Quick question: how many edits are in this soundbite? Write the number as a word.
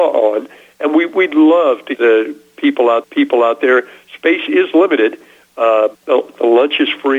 three